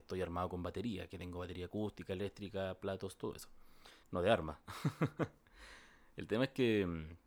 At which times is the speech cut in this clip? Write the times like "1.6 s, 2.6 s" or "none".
4.0 s